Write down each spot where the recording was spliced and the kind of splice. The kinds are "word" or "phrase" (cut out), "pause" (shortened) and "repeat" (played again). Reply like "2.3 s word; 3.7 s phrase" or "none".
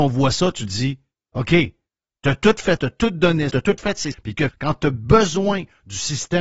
2.8 s word; 3.5 s word; 4.1 s word; 4.5 s word